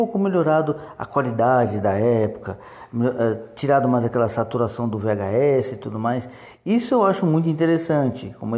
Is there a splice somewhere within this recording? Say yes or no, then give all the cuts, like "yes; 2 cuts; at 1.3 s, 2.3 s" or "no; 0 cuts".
no; 0 cuts